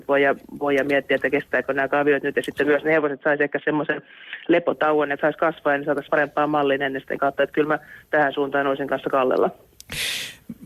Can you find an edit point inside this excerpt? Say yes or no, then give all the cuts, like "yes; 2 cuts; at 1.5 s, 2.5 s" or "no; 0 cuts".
yes; 3 cuts; at 5.2 s, 6.1 s, 7.2 s